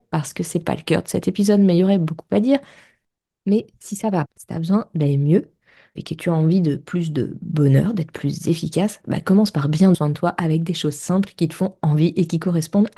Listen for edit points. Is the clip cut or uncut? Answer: cut